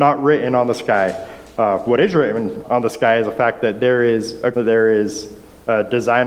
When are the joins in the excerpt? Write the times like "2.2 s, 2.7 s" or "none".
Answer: 2.6 s, 4.5 s